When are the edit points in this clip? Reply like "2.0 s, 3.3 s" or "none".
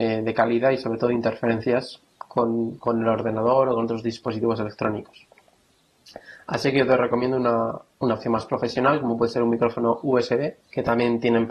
10.6 s